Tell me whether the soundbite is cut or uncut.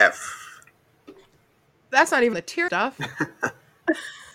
cut